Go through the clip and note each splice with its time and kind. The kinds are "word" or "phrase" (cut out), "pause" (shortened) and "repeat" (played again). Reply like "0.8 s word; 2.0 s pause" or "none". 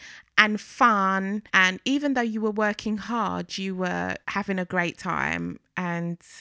1.5 s pause; 4.2 s pause